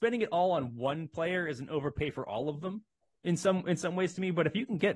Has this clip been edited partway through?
no; 0 cuts

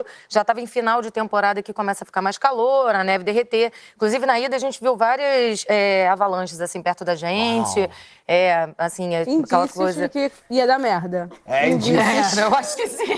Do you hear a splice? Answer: no; 0 cuts

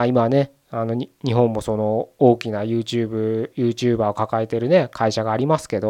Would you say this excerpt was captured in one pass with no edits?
yes; 0 cuts

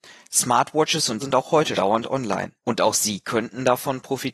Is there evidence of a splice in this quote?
yes; 3 cuts; at 1.2 s, 1.7 s, 2.6 s

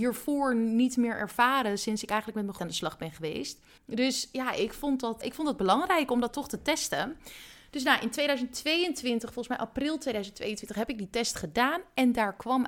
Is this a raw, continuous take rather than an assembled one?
no; 3 cuts; at 2.6 s, 3.8 s, 5.2 s

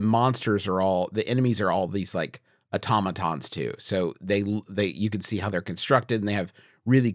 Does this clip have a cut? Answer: no; 0 cuts

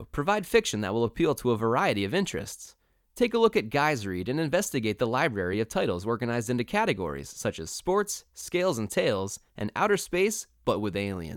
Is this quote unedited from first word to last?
yes; 0 cuts

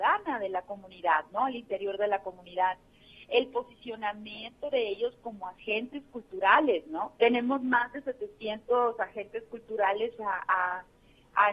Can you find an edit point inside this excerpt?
yes; 1 cut; at 7.2 s

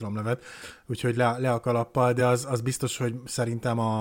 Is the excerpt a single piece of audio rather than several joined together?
yes; 0 cuts

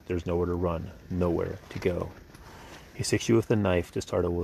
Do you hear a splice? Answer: no; 0 cuts

